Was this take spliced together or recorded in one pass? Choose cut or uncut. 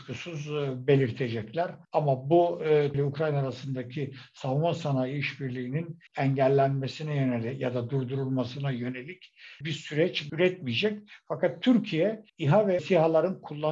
cut